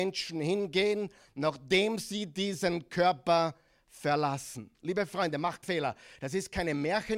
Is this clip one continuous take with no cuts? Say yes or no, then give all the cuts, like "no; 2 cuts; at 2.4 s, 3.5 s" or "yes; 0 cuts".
no; 1 cut; at 5.6 s